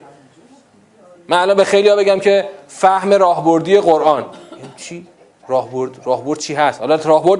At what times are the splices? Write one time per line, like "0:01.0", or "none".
none